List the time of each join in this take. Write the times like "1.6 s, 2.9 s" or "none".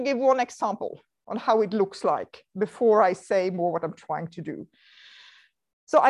none